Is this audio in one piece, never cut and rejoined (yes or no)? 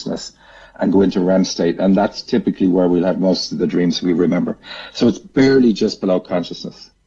yes